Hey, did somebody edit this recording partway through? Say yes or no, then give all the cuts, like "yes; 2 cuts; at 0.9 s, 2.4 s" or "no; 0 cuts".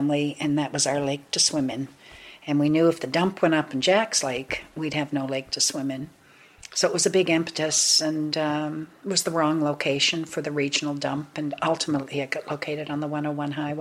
no; 0 cuts